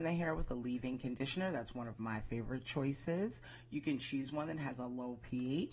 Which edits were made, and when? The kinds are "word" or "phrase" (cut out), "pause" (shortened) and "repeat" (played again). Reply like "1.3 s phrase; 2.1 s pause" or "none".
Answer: none